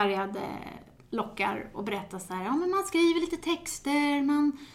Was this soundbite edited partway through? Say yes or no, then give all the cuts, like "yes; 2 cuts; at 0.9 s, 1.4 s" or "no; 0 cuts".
no; 0 cuts